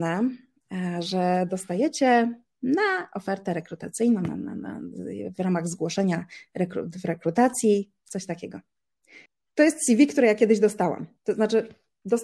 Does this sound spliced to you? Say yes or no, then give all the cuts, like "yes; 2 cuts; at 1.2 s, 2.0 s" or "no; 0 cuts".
yes; 1 cut; at 9.3 s